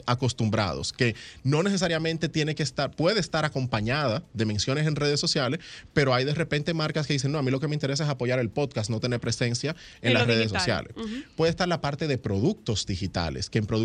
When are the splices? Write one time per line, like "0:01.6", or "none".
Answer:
none